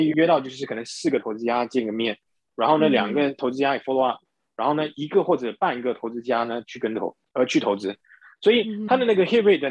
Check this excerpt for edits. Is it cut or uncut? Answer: uncut